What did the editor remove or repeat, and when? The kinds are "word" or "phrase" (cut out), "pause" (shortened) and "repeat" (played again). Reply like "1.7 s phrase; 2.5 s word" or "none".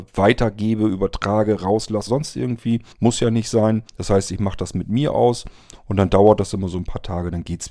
2.1 s word; 2.9 s pause; 3.9 s pause